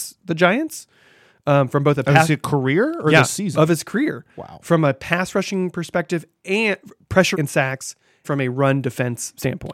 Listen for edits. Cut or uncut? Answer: cut